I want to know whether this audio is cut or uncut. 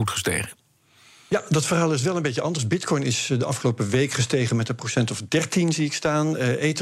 uncut